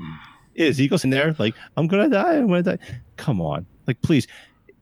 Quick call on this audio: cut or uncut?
cut